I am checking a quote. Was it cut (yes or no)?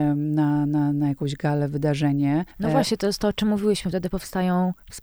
yes